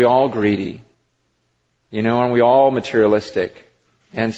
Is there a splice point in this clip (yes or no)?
no